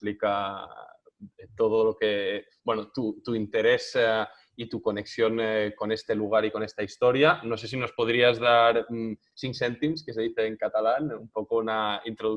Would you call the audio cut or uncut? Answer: uncut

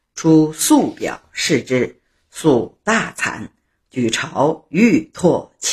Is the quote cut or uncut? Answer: uncut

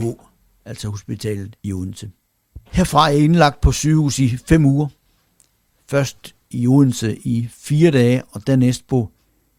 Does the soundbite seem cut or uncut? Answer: cut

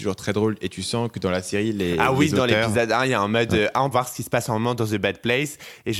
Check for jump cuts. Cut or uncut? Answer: cut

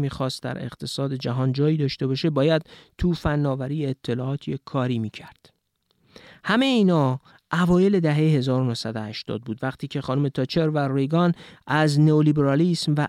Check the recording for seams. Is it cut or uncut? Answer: uncut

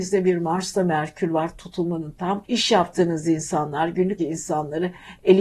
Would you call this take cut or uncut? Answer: cut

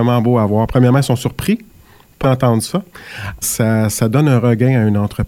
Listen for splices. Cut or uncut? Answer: cut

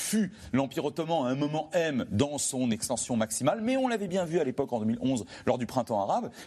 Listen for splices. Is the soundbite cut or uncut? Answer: uncut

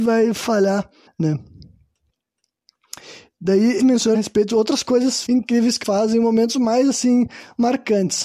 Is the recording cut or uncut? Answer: cut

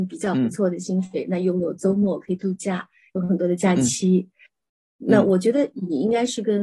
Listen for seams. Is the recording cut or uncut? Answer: uncut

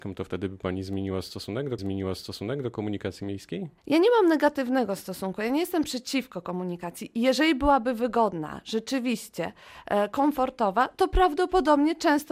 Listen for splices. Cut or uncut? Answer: cut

